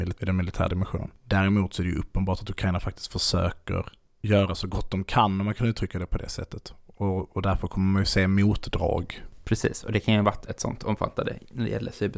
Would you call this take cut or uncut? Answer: uncut